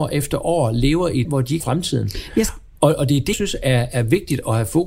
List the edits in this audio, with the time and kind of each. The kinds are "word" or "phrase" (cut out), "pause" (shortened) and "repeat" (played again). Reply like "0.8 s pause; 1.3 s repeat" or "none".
1.2 s word; 1.6 s word; 3.3 s word